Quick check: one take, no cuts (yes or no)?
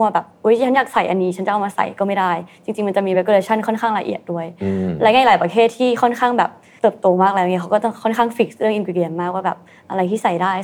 yes